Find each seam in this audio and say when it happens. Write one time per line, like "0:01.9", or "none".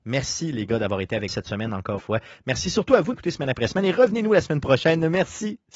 0:01.3
0:02.0
0:03.1

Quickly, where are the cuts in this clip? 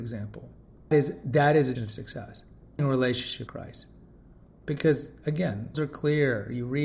0:00.9
0:01.8
0:02.8
0:03.5
0:05.7

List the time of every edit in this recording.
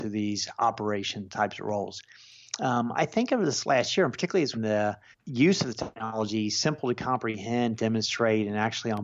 0:04.5
0:05.1

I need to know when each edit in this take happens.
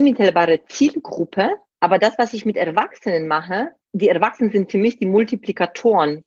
0:01.7
0:03.8

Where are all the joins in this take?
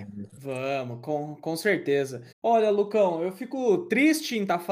0:02.3

